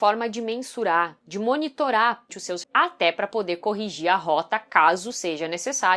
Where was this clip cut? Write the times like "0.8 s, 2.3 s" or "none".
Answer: 2.3 s, 2.6 s